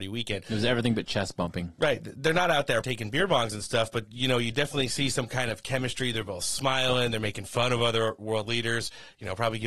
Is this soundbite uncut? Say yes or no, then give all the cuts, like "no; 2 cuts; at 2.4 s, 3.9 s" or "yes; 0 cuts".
no; 1 cut; at 2.8 s